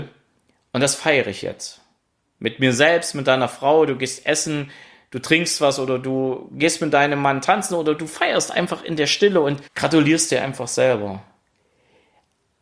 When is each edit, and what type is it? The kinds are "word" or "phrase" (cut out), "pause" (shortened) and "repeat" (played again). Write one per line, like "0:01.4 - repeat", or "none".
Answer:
0:09.7 - pause